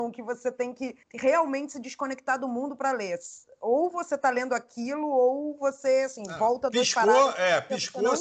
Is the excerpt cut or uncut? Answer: cut